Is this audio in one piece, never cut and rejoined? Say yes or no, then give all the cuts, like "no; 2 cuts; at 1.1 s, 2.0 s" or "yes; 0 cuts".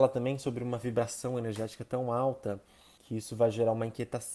no; 1 cut; at 3.0 s